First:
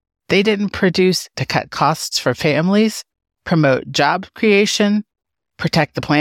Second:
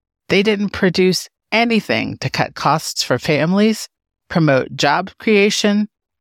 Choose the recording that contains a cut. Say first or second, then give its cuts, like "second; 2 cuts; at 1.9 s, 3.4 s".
first; 1 cut; at 1.3 s